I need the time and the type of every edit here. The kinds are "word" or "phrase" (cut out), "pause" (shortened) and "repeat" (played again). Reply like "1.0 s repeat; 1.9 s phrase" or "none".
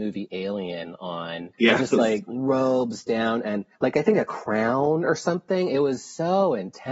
1.5 s pause; 3.7 s pause